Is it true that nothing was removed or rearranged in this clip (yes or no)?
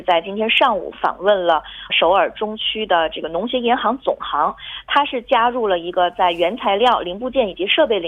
no